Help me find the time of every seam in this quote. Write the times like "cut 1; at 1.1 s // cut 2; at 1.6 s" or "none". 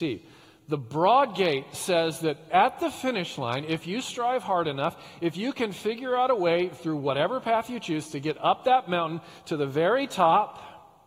none